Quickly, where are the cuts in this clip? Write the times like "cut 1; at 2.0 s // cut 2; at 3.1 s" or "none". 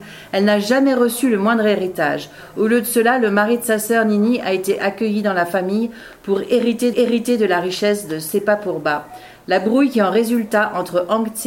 cut 1; at 6.9 s

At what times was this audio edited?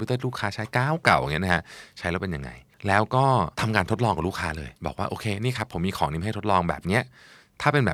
cut 1; at 4.8 s

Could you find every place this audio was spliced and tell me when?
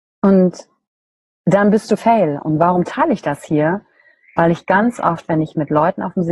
cut 1; at 2.0 s

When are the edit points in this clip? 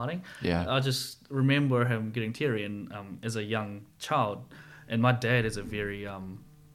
none

